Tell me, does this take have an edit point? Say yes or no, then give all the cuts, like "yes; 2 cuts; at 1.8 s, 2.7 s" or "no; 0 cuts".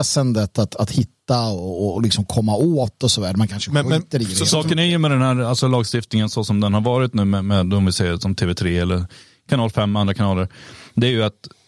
no; 0 cuts